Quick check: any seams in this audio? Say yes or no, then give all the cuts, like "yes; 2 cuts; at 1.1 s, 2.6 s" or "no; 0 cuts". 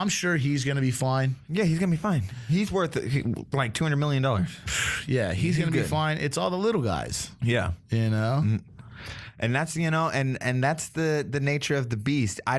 no; 0 cuts